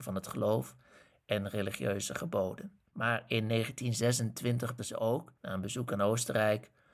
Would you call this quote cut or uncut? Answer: cut